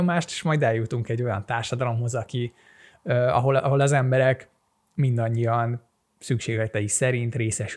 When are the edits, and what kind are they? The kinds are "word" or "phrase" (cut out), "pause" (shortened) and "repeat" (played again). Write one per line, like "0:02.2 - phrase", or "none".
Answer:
none